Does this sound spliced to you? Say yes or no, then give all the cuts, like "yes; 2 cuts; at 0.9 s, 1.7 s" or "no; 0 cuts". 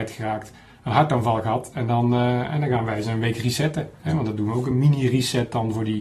no; 0 cuts